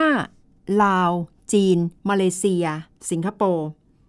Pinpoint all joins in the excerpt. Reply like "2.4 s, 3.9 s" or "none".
2.0 s